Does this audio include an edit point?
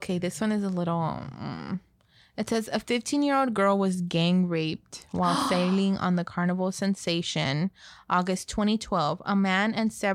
no; 0 cuts

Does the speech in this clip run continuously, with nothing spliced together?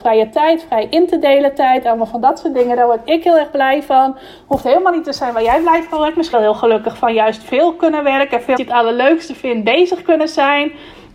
no; 2 cuts; at 6.3 s, 8.6 s

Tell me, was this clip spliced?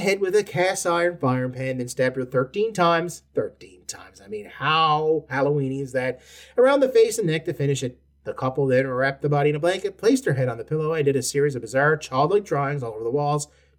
no; 0 cuts

